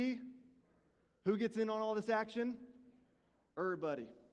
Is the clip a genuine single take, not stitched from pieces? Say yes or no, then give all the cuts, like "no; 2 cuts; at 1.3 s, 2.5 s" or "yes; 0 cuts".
yes; 0 cuts